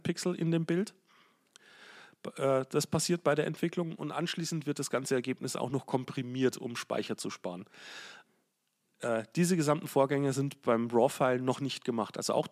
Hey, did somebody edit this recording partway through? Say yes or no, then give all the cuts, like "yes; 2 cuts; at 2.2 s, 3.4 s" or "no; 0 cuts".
no; 0 cuts